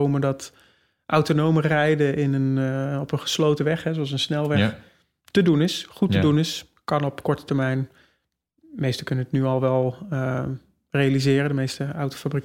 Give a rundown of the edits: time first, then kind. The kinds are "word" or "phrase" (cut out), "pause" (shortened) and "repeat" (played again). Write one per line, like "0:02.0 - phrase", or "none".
none